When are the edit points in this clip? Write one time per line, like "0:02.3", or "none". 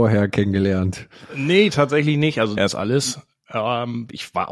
0:02.6